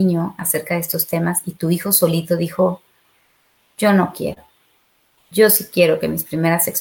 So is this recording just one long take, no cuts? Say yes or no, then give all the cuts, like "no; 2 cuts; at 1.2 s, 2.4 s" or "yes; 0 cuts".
yes; 0 cuts